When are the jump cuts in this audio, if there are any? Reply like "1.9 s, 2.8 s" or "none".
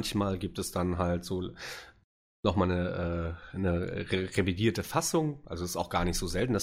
none

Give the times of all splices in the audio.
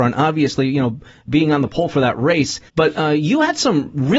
1.3 s, 2.7 s

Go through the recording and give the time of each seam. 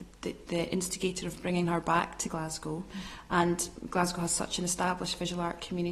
none

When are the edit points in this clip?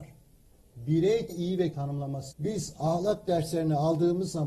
1.3 s, 1.7 s, 2.3 s

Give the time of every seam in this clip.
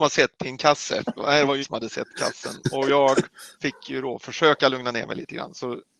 1.6 s, 3.5 s

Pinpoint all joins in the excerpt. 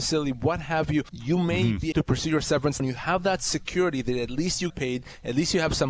1.1 s, 1.9 s, 2.8 s, 4.7 s

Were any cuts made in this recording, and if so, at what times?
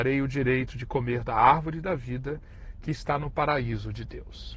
none

